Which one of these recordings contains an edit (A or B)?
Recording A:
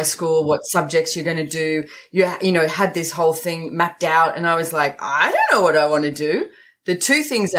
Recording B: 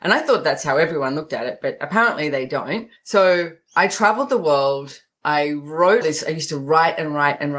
B